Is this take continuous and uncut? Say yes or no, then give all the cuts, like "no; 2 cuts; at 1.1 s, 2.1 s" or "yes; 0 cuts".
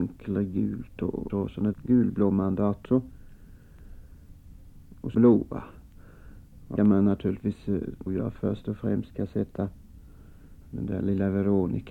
no; 7 cuts; at 1.3 s, 1.7 s, 2.9 s, 5.1 s, 6.8 s, 8.1 s, 10.6 s